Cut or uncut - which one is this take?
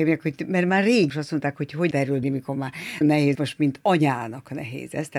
cut